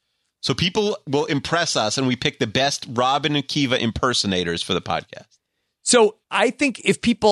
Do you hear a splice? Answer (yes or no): yes